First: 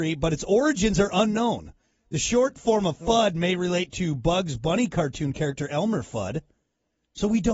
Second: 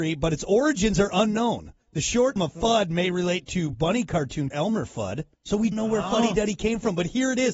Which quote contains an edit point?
second; 6 cuts; at 1.8 s, 2.4 s, 3.7 s, 4.5 s, 5.3 s, 5.7 s

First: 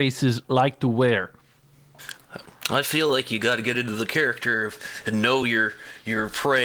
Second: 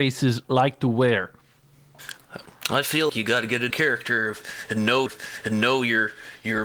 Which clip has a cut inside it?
second; 3 cuts; at 3.1 s, 3.7 s, 5.1 s

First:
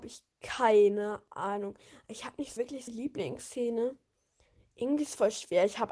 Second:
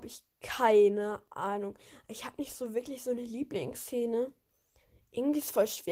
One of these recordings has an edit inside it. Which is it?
first; 2 cuts; at 2.6 s, 2.9 s

